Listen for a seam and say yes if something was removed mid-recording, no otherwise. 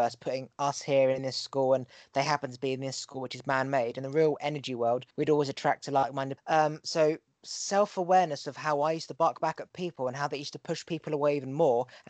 yes